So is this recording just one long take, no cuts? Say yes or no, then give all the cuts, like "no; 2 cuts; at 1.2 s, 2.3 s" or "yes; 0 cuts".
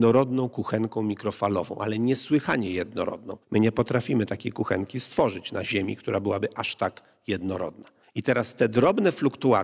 no; 2 cuts; at 3.4 s, 8.0 s